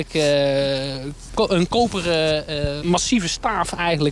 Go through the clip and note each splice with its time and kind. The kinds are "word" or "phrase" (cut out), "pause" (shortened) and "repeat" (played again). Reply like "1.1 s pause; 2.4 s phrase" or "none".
1.3 s word; 2.8 s word